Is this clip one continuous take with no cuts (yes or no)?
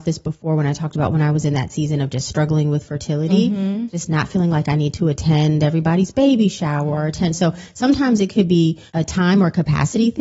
no